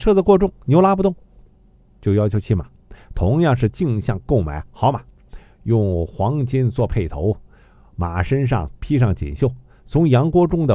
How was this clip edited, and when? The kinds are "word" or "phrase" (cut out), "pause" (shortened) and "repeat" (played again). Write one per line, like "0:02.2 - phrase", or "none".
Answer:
none